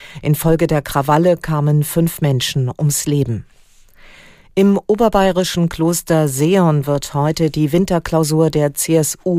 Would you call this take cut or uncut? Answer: uncut